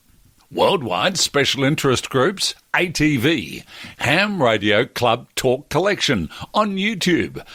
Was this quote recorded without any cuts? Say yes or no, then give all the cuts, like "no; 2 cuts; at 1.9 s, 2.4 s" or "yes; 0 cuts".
yes; 0 cuts